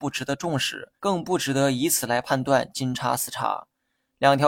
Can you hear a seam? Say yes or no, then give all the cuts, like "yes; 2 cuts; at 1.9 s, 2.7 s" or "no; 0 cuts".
yes; 1 cut; at 1.0 s